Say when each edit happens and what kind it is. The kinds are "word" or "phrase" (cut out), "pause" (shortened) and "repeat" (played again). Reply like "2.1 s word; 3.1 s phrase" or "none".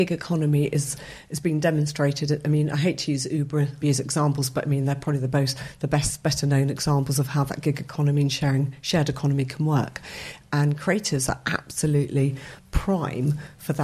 3.8 s phrase

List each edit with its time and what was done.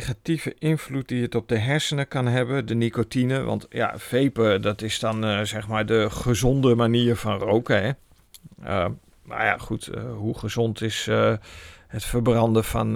none

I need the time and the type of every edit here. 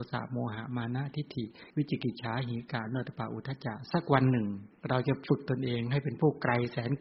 1.7 s pause; 4.8 s pause

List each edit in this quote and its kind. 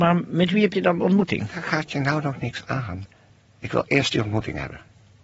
3.3 s pause

